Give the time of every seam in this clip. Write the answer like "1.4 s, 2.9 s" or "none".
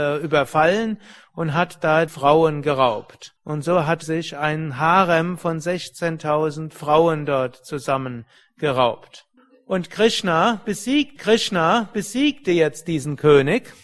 2.1 s, 3.4 s, 4.0 s, 9.4 s, 11.2 s